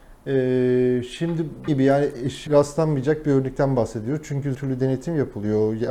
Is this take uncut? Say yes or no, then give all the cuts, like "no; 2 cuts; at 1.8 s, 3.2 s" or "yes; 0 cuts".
no; 3 cuts; at 1.7 s, 2.5 s, 4.5 s